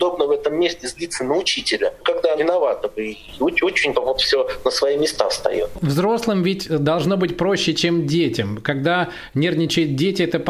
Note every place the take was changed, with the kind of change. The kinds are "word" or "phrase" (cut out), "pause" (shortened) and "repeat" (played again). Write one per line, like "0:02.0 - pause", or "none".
0:02.4 - word
0:03.9 - word